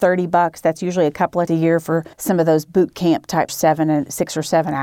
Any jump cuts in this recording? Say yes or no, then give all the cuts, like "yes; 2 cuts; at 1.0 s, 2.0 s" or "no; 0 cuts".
yes; 3 cuts; at 1.5 s, 2.1 s, 3.5 s